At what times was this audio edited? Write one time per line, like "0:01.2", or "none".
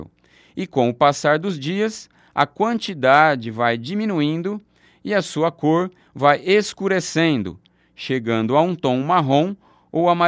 none